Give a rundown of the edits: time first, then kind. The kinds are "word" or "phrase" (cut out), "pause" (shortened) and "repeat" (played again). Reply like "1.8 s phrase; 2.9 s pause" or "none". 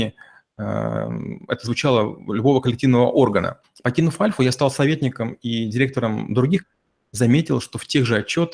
3.6 s pause; 6.6 s phrase